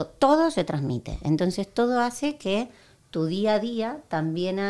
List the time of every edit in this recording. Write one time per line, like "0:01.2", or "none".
none